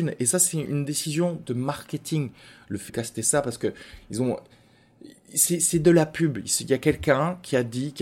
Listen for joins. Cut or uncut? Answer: cut